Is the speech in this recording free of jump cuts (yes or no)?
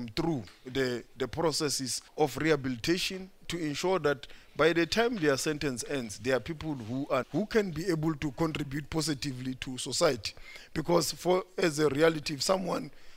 no